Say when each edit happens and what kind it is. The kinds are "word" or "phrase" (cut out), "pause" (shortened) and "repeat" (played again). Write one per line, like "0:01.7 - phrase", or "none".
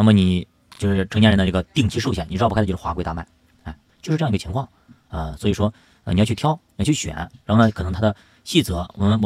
none